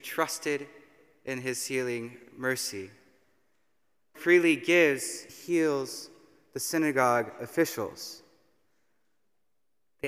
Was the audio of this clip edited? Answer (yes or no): yes